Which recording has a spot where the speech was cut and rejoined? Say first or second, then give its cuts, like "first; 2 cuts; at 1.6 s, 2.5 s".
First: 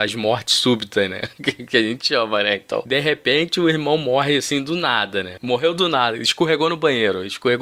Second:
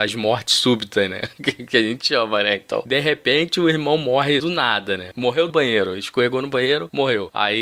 second; 2 cuts; at 4.4 s, 5.5 s